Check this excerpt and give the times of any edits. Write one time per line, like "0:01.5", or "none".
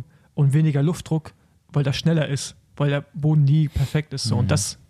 none